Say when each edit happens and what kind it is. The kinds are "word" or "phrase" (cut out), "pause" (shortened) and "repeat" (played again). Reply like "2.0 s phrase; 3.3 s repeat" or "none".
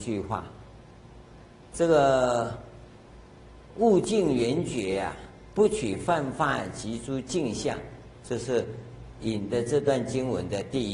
5.5 s phrase